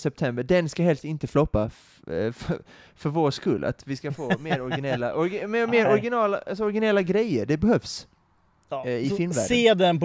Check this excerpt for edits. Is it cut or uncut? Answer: uncut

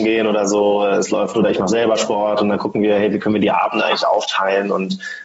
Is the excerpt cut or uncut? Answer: cut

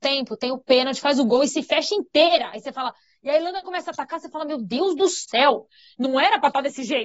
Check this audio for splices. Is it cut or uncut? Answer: uncut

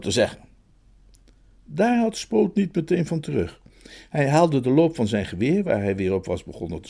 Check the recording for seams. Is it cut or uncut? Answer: uncut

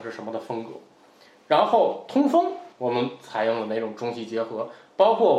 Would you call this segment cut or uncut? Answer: cut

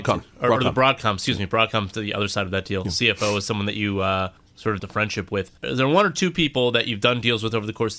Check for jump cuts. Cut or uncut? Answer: cut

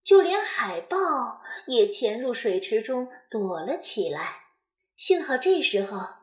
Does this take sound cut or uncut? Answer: uncut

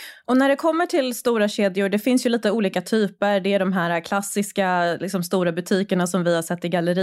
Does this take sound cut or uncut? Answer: uncut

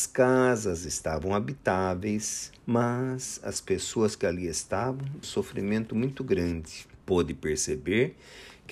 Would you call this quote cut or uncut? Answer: cut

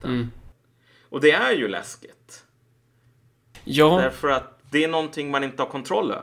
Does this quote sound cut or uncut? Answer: uncut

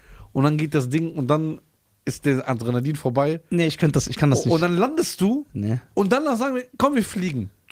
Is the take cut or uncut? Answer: uncut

